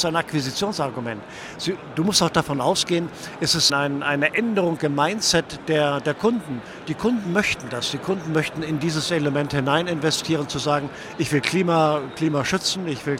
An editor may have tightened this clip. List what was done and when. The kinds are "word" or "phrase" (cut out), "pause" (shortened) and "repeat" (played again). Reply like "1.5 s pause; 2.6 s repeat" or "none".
3.7 s word